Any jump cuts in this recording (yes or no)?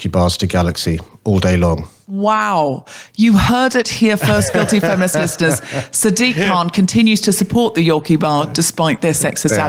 no